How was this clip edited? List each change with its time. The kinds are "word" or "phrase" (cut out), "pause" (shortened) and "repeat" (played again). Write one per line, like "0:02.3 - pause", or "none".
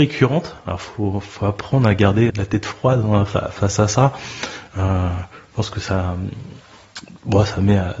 0:02.3 - word